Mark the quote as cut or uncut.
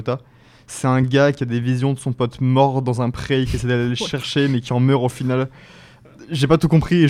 uncut